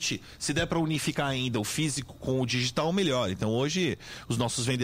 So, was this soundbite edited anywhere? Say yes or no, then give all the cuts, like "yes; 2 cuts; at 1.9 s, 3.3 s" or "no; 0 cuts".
no; 0 cuts